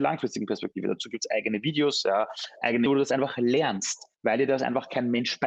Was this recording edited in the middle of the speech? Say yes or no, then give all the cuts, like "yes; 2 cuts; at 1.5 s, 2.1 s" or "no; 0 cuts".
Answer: yes; 2 cuts; at 2.9 s, 4.1 s